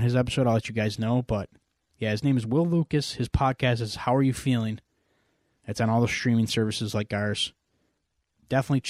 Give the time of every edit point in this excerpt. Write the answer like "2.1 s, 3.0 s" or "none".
none

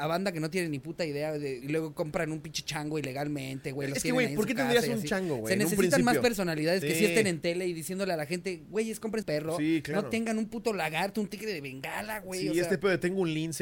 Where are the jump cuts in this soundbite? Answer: 1.6 s, 9.2 s

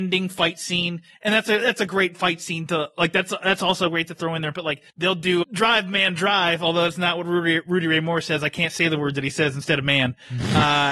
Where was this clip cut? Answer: 4.9 s, 5.4 s

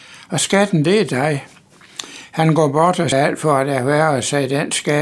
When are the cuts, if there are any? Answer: 3.1 s

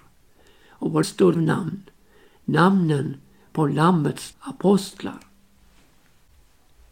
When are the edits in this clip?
1.0 s, 1.3 s, 4.3 s

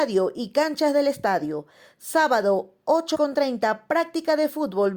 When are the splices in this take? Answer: 3.1 s

